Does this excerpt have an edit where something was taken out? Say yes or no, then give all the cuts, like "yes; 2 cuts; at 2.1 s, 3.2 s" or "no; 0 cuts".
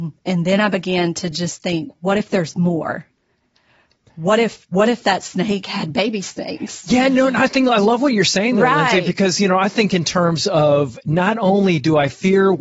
no; 0 cuts